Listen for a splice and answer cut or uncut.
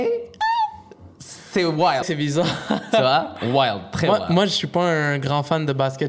cut